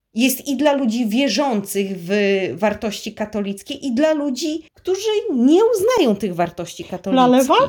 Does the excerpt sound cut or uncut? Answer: cut